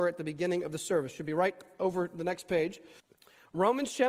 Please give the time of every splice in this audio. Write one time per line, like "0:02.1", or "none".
0:03.0